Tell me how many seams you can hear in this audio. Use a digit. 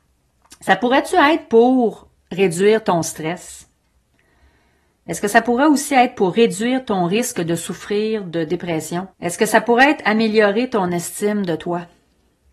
1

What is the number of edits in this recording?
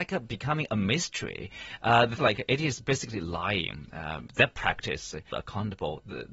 2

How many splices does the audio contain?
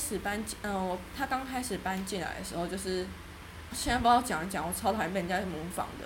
1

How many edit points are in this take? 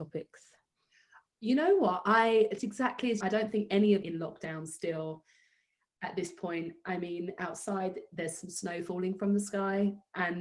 3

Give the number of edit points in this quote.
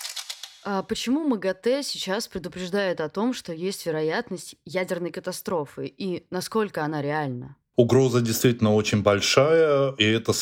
0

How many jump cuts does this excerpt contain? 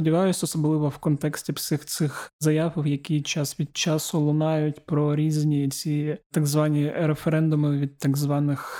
0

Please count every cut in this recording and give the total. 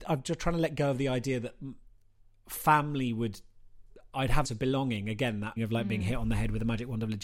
2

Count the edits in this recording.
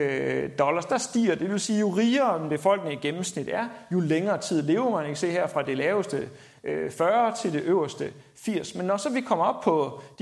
0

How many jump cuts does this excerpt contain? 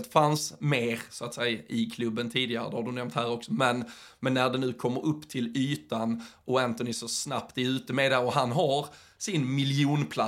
0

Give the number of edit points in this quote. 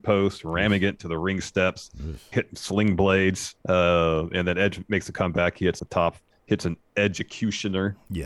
3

